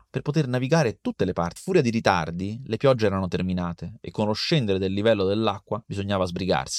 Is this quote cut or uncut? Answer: cut